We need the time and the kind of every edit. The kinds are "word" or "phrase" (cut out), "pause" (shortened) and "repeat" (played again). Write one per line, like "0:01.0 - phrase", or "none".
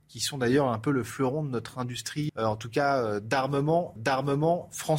0:02.3 - word
0:04.0 - repeat